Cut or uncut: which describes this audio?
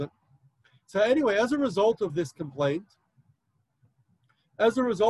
uncut